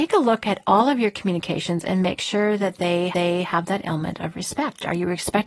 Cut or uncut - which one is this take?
cut